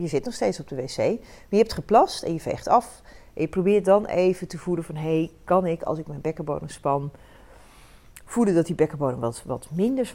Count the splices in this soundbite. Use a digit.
0